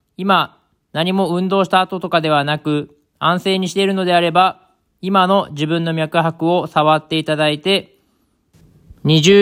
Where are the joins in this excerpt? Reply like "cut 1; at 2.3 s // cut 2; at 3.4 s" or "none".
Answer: none